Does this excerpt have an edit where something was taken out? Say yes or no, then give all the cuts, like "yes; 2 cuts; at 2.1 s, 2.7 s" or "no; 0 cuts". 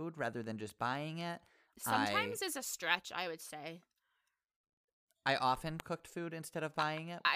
no; 0 cuts